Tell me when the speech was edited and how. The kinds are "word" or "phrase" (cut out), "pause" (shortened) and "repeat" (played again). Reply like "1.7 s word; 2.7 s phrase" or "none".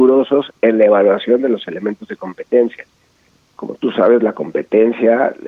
none